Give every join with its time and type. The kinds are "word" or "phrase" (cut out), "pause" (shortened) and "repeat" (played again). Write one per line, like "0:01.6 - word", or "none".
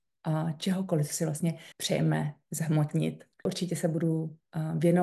0:01.7 - pause
0:03.3 - pause

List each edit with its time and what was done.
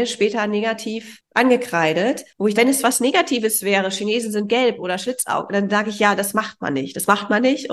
0:02.6 - phrase

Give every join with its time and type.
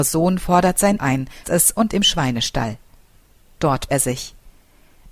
0:01.0 - word
0:01.4 - word
0:01.9 - word
0:03.9 - word

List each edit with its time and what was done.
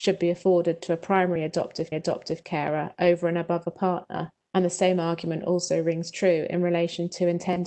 0:01.9 - repeat

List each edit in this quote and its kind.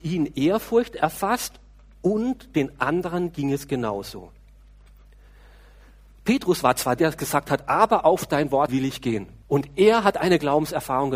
0:07.0 - word
0:08.7 - word
0:09.4 - pause

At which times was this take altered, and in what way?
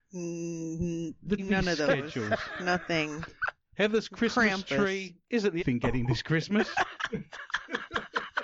0:01.4 - word
0:05.6 - word
0:06.0 - word

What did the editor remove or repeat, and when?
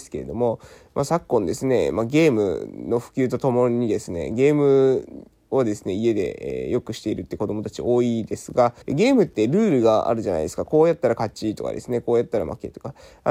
0:08.8 - pause

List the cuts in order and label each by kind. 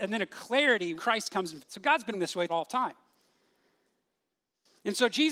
0:01.0 - word
0:01.6 - word
0:02.1 - word
0:02.5 - word

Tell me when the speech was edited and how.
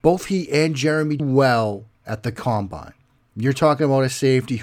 0:01.2 - phrase
0:01.9 - pause

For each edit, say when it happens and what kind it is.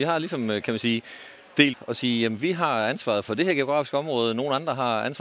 0:01.7 - phrase

